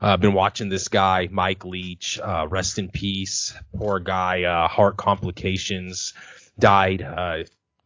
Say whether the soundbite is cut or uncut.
uncut